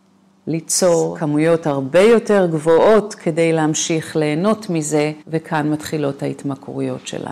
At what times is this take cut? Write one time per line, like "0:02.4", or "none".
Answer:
0:05.2